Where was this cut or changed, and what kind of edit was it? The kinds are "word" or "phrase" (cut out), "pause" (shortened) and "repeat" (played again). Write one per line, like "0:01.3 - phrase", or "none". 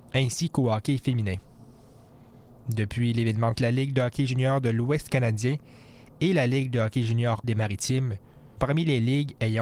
0:03.6 - word
0:07.4 - word
0:08.6 - word